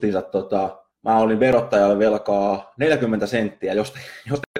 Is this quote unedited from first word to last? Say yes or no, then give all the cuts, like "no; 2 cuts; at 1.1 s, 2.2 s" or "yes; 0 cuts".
no; 1 cut; at 0.9 s